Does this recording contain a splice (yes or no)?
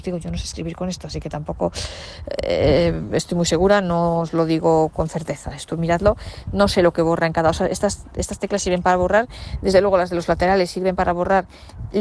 no